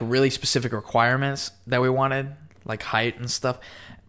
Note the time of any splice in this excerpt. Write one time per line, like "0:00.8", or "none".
none